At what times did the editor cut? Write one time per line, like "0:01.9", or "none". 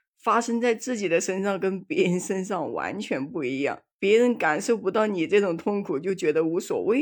0:03.9